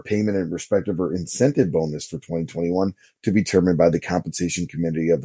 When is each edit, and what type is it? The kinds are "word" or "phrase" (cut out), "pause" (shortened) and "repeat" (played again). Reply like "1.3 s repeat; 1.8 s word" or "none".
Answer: none